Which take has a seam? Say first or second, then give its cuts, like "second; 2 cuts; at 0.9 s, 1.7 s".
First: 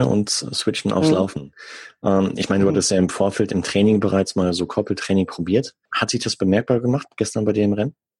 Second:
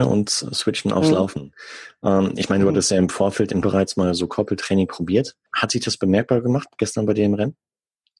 second; 1 cut; at 3.6 s